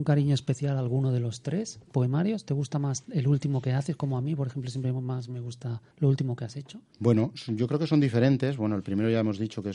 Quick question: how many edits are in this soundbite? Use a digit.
2